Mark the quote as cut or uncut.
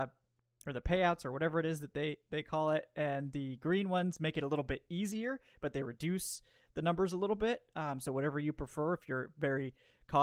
uncut